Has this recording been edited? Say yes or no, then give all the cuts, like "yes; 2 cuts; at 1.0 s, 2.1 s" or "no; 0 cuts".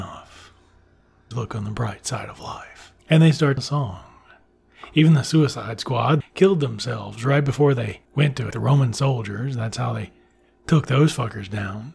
yes; 6 cuts; at 1.3 s, 3.0 s, 3.6 s, 6.2 s, 8.1 s, 8.5 s